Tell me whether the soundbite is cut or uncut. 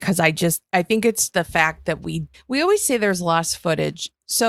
cut